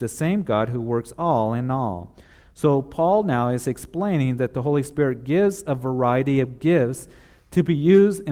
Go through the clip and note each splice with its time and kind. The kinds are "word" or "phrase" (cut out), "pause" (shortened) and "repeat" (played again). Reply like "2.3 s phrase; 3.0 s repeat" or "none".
none